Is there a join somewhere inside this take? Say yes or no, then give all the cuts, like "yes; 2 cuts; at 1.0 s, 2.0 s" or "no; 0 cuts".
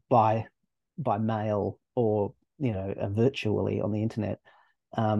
no; 0 cuts